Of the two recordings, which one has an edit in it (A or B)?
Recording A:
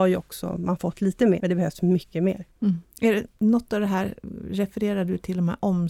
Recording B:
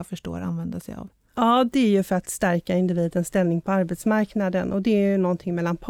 A